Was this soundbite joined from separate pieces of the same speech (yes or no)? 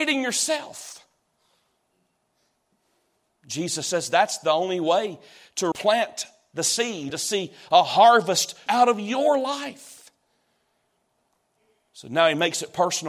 yes